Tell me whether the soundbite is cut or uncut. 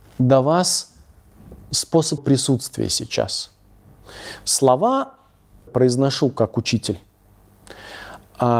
cut